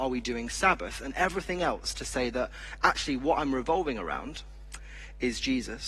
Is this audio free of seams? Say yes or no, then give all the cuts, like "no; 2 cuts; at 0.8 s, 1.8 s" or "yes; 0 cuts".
yes; 0 cuts